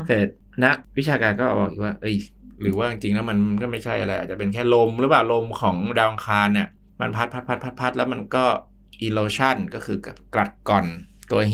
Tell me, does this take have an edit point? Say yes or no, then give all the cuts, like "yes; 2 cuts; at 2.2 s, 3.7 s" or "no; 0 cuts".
no; 0 cuts